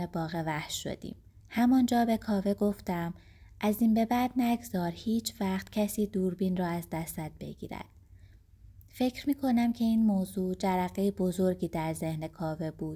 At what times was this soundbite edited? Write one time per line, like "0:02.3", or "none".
0:01.4